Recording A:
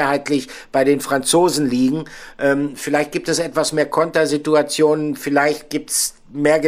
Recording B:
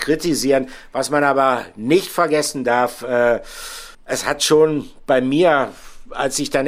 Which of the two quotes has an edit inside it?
B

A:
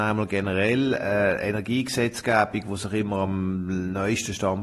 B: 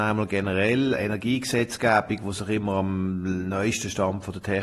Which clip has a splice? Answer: B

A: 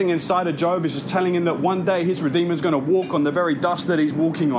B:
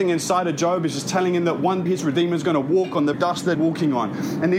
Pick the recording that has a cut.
B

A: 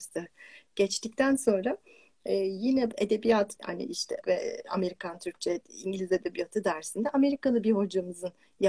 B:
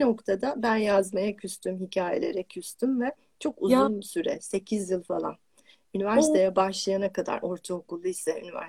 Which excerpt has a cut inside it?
A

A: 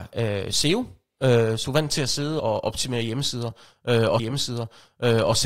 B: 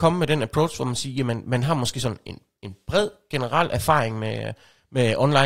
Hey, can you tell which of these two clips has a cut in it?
A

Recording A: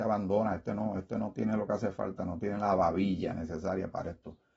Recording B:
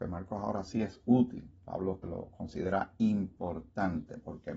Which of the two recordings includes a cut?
B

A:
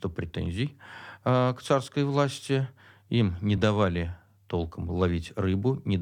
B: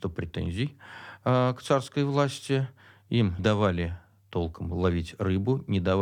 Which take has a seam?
B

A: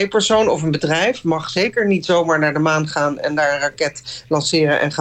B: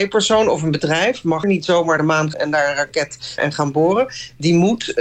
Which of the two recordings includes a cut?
B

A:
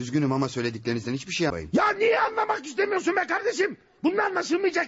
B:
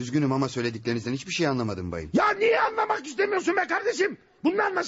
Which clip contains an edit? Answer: A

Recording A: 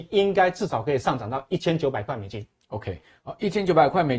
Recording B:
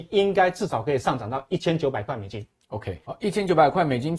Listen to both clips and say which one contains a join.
B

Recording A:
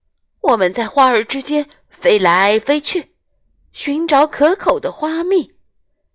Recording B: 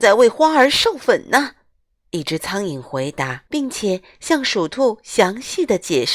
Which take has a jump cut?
B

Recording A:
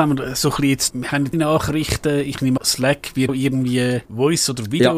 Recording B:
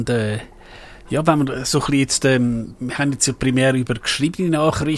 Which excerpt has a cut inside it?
A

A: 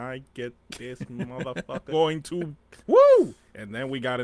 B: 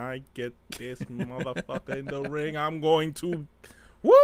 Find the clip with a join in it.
A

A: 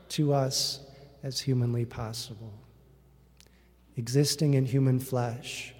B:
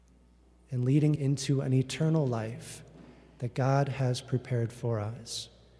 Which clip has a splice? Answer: B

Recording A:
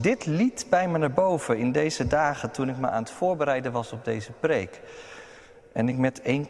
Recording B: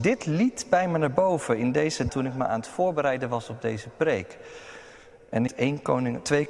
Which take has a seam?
B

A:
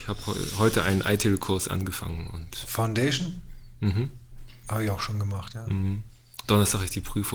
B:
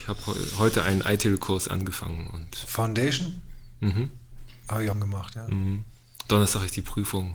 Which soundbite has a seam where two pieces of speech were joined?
B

